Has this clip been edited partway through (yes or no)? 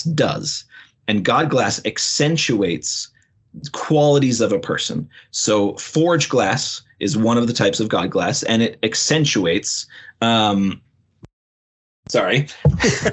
no